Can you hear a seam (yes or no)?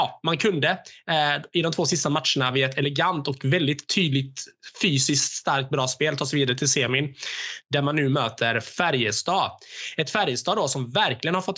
no